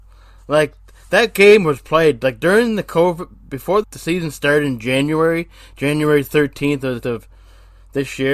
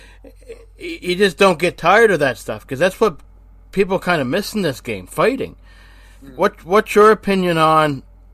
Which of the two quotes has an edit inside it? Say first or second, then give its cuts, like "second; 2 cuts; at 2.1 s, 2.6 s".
first; 2 cuts; at 3.8 s, 7.0 s